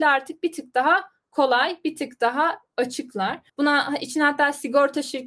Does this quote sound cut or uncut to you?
cut